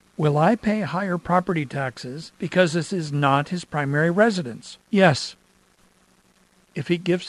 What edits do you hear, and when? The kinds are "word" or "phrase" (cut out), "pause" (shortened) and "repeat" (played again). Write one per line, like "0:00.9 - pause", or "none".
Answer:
0:02.3 - pause
0:04.8 - pause